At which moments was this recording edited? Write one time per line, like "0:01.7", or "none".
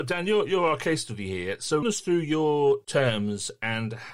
0:01.8

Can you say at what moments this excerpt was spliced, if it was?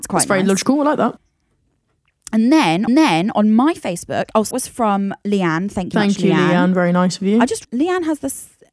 0:02.9
0:04.5
0:05.9
0:07.6

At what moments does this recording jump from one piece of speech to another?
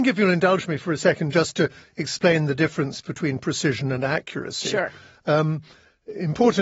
none

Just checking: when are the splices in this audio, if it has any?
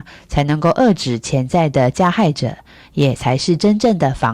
none

